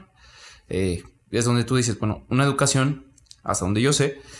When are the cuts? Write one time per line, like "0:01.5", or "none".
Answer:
none